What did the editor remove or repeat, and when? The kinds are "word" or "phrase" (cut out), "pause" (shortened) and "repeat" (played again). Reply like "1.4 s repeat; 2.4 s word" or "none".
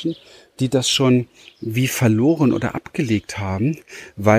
none